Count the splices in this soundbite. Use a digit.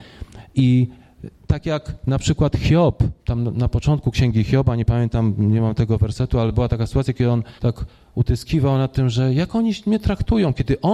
2